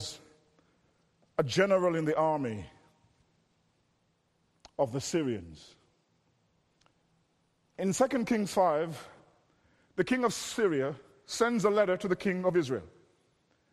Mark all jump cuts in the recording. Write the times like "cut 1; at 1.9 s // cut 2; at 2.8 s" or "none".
none